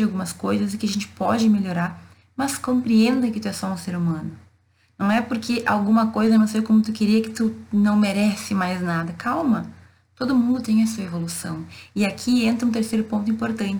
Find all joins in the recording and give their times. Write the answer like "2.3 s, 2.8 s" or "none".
none